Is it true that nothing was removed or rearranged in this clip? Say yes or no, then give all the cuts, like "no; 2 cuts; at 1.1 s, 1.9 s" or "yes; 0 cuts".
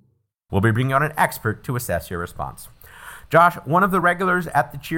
yes; 0 cuts